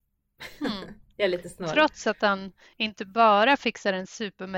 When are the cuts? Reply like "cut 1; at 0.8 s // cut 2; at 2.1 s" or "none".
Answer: none

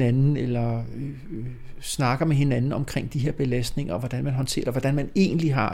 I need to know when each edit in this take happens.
none

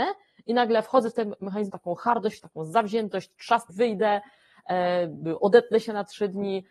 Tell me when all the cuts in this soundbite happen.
cut 1; at 1.7 s // cut 2; at 3.7 s

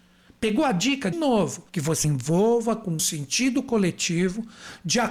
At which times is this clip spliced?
cut 1; at 1.1 s // cut 2; at 1.7 s // cut 3; at 2.0 s // cut 4; at 3.0 s

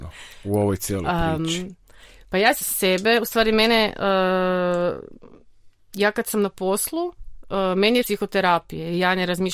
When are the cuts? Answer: cut 1; at 2.6 s // cut 2; at 8.0 s

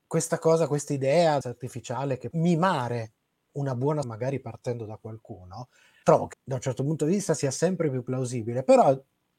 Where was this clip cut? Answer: cut 1; at 1.4 s // cut 2; at 2.3 s // cut 3; at 4.0 s // cut 4; at 6.0 s // cut 5; at 6.3 s

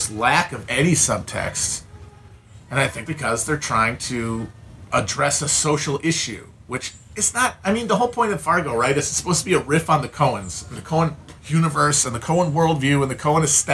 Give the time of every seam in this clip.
cut 1; at 3.1 s // cut 2; at 4.9 s // cut 3; at 11.4 s

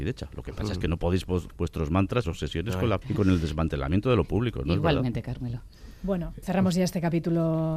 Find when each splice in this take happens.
cut 1; at 1.5 s // cut 2; at 2.2 s // cut 3; at 3.0 s // cut 4; at 6.4 s

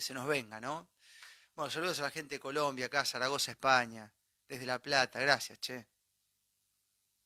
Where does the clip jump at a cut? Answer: none

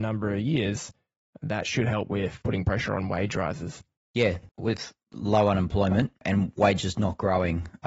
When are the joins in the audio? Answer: none

